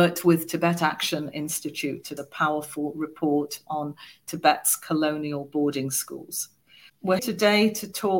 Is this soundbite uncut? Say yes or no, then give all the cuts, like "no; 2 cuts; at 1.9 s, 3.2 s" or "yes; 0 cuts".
no; 2 cuts; at 2.2 s, 7.2 s